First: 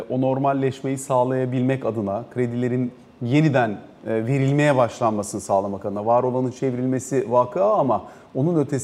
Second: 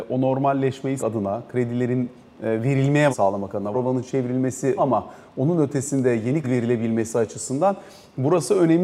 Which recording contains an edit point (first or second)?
second